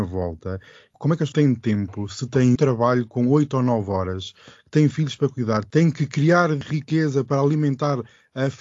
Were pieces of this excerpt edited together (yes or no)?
yes